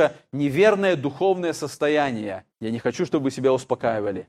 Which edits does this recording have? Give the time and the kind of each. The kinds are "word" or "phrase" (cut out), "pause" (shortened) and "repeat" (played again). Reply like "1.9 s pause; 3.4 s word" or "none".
2.5 s pause